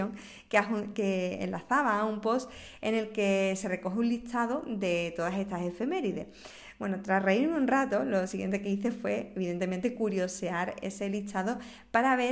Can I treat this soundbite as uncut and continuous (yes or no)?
yes